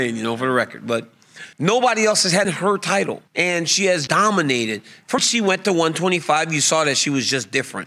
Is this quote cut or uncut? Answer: cut